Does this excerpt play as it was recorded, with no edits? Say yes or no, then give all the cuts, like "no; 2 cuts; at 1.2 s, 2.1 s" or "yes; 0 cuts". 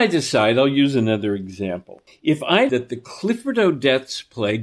no; 2 cuts; at 2.1 s, 2.7 s